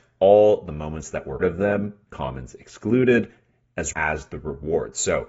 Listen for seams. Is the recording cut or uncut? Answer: cut